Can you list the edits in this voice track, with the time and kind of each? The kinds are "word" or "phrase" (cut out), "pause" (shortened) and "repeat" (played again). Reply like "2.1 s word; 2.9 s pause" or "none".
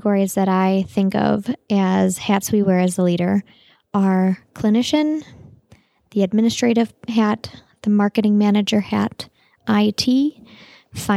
none